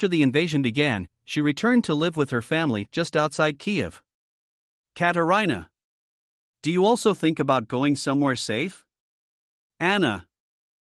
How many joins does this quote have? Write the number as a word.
zero